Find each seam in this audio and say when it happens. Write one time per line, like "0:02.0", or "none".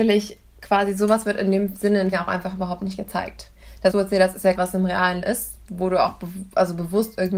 0:02.1
0:03.9
0:04.5
0:05.2